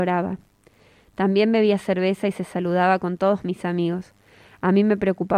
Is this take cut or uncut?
uncut